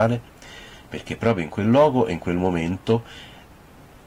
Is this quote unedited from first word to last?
yes; 0 cuts

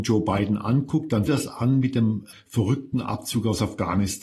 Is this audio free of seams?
no; 1 cut; at 1.3 s

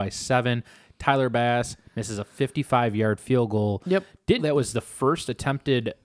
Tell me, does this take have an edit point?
yes; 1 cut; at 4.4 s

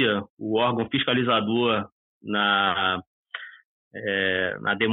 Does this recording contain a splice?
no; 0 cuts

